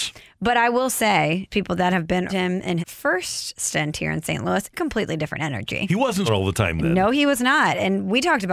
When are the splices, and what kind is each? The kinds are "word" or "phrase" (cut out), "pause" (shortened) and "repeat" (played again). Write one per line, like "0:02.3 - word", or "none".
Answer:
0:01.5 - word
0:02.3 - word
0:02.8 - word
0:04.7 - word
0:06.3 - word